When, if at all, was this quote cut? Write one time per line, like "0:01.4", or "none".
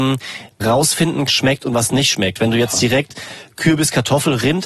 0:01.3